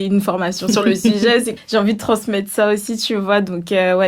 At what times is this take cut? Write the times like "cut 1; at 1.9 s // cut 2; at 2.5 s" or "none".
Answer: cut 1; at 1.6 s